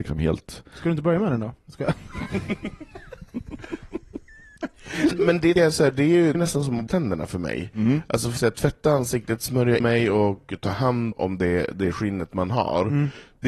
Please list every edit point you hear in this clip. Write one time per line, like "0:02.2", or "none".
0:05.1
0:05.6
0:06.3
0:06.9
0:08.4
0:09.8
0:11.1